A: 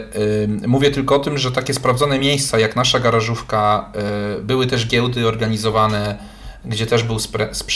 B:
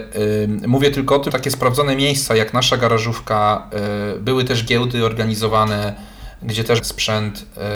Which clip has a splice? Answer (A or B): B